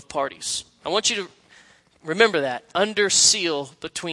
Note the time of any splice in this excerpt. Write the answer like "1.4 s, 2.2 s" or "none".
none